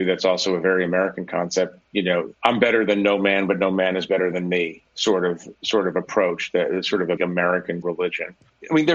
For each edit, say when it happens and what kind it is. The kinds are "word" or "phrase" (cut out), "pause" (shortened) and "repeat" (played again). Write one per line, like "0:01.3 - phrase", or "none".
0:02.4 - pause
0:07.2 - word
0:07.8 - word

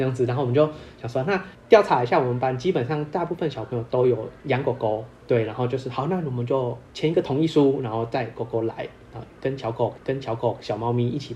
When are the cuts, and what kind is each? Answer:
0:04.4 - pause
0:10.0 - repeat

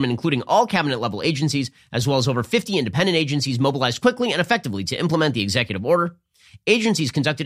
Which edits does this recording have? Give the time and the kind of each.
none

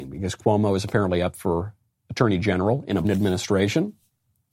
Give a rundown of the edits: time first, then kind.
0:03.0 - word

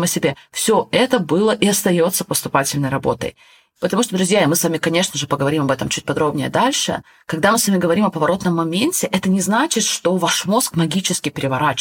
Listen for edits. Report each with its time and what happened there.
none

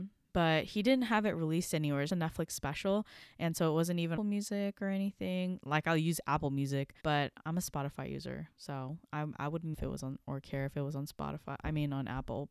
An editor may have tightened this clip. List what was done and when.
0:02.1 - word
0:04.2 - phrase
0:07.0 - pause
0:09.7 - phrase

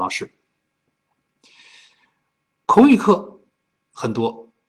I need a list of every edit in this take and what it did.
none

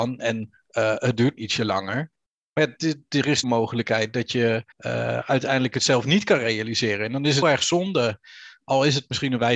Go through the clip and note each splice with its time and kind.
0:01.4 - word
0:03.4 - phrase
0:04.7 - pause
0:07.4 - word

